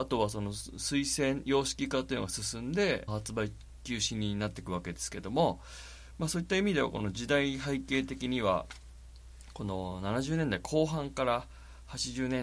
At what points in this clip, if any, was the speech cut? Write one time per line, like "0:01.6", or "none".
0:03.1